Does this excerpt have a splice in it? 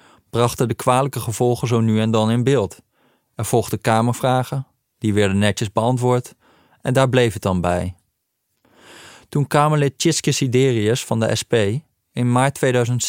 no; 0 cuts

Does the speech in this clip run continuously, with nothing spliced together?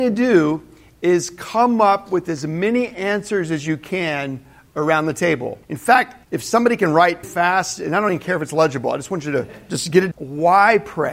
no; 4 cuts; at 5.6 s, 6.2 s, 7.2 s, 10.1 s

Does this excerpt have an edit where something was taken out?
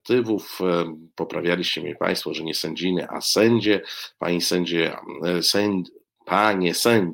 no; 0 cuts

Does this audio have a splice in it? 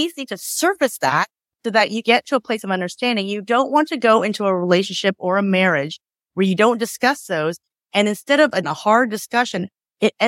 yes; 2 cuts; at 2.0 s, 8.6 s

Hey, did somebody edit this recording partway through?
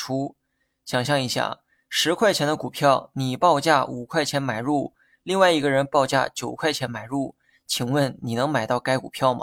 no; 0 cuts

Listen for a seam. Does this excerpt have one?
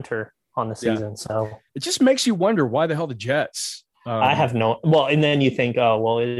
yes; 1 cut; at 1.7 s

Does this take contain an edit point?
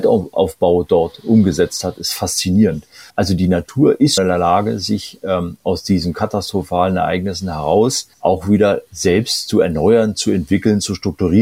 yes; 3 cuts; at 3.1 s, 4.2 s, 8.1 s

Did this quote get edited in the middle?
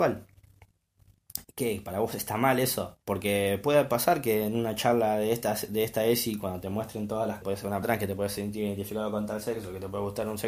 yes; 3 cuts; at 3.0 s, 7.4 s, 7.8 s

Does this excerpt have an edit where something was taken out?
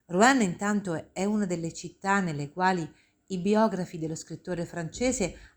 no; 0 cuts

